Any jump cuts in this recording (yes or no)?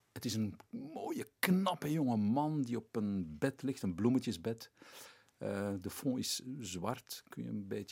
no